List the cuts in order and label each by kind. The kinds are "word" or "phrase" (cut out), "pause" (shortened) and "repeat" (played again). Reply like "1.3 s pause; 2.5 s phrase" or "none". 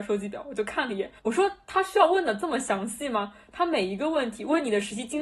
1.2 s pause